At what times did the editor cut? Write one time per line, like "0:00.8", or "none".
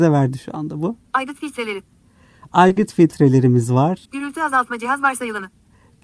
0:04.0